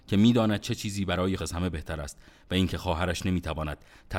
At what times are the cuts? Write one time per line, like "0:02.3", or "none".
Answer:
0:01.4